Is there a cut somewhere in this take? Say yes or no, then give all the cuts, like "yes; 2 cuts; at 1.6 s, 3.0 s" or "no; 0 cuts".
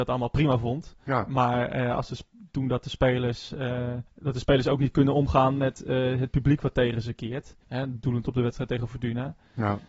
yes; 2 cuts; at 4.1 s, 7.6 s